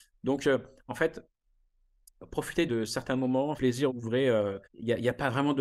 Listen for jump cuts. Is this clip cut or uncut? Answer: cut